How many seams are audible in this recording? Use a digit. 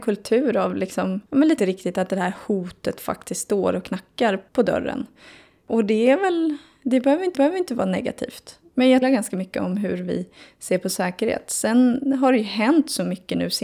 5